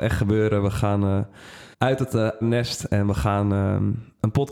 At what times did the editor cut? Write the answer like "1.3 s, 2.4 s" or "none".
1.7 s, 2.4 s